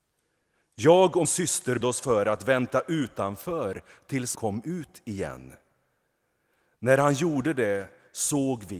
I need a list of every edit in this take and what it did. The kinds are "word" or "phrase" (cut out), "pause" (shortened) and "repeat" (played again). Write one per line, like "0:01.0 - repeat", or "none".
0:01.2 - word
0:01.8 - word
0:04.3 - word

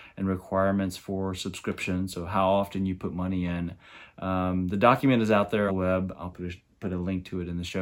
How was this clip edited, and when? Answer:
0:05.7 - word
0:06.3 - word

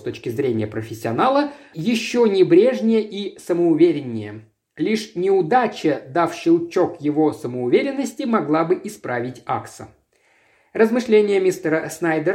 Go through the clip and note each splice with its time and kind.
0:01.7 - word

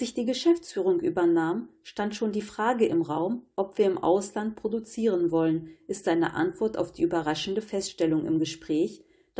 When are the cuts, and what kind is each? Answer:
none

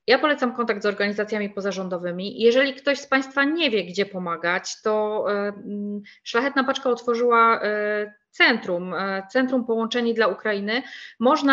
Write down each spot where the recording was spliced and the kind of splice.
none

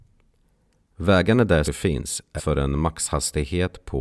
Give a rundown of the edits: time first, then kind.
0:01.6 - word
0:02.4 - word

